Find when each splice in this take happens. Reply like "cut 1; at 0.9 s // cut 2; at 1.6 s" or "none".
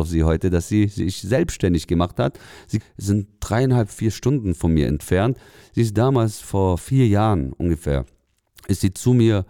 cut 1; at 2.8 s